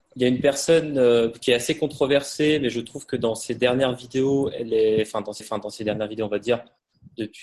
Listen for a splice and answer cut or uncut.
cut